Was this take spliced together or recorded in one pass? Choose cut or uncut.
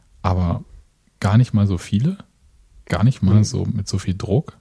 uncut